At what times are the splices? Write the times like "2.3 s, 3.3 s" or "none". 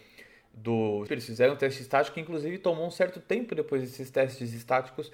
1.1 s